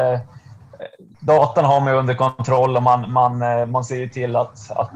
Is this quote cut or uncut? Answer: uncut